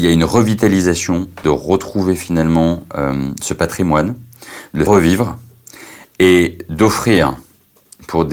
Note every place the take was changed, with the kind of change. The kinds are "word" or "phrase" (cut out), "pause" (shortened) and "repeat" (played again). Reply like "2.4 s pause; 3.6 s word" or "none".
1.4 s word; 4.9 s word